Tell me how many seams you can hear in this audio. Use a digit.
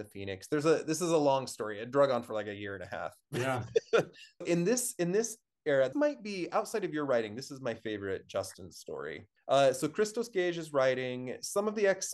4